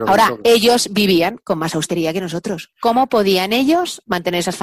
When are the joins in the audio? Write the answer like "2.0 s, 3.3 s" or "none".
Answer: none